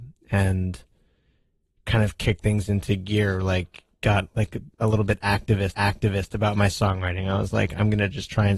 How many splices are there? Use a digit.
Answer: 2